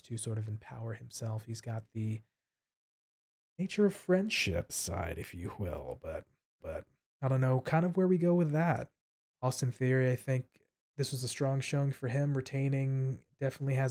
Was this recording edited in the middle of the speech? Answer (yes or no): yes